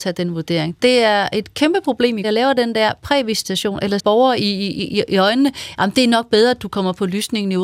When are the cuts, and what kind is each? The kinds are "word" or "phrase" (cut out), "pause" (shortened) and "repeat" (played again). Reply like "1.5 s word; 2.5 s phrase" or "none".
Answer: 2.2 s phrase; 4.0 s word